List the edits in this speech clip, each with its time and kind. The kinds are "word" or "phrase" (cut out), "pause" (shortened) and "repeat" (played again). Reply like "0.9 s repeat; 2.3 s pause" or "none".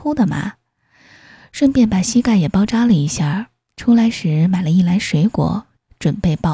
none